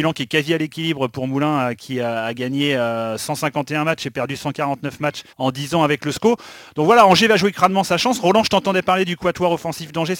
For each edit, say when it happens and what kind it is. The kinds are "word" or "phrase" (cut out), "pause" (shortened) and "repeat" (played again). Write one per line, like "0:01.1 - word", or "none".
0:05.3 - pause